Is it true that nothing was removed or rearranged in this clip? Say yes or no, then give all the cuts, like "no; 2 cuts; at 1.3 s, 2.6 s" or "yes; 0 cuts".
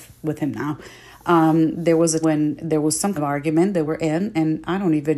no; 3 cuts; at 2.2 s, 3.2 s, 3.8 s